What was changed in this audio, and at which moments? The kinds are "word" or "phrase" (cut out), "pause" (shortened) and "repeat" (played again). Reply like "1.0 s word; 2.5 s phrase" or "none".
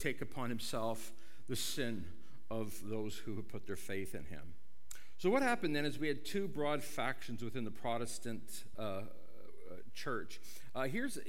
none